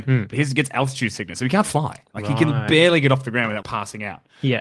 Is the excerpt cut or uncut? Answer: cut